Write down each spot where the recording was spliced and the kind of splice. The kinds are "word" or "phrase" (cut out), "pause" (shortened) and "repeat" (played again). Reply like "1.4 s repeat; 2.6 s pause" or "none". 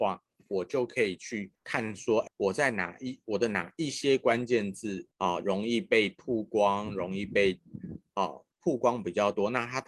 1.5 s pause; 2.3 s word; 5.1 s pause; 8.5 s pause

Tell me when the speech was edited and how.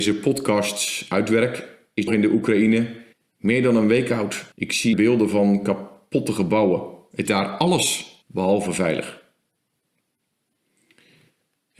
2.1 s phrase; 3.1 s pause; 4.5 s pause; 4.9 s word; 7.3 s word; 8.2 s pause

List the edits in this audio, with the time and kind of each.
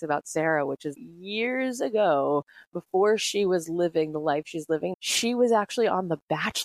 1.0 s word; 4.9 s word

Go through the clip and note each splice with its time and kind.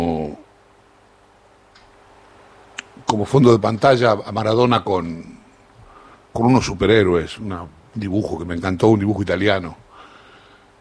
none

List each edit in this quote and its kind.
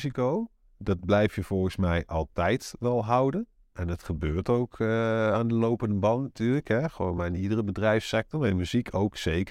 none

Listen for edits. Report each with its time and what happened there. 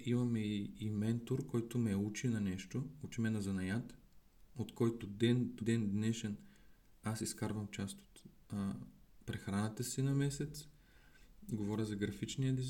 5.0 s phrase; 5.6 s word

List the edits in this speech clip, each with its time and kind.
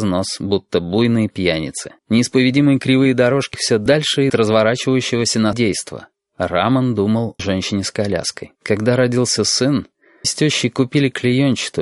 2.0 s pause; 3.5 s word; 4.3 s phrase; 5.5 s word; 7.4 s word; 8.6 s pause; 10.2 s word

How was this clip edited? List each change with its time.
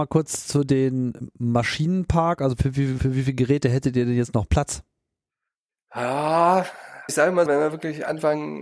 2.6 s word; 3.0 s word; 7.1 s word; 7.5 s word

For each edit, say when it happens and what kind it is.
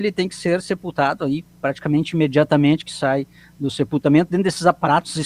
none

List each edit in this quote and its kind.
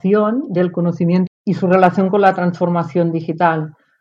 1.3 s phrase

